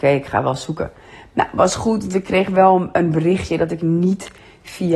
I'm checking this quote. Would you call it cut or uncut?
uncut